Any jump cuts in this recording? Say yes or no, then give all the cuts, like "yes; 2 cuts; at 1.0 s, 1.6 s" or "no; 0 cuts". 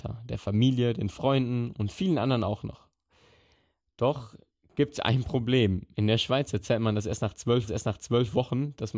yes; 1 cut; at 7.7 s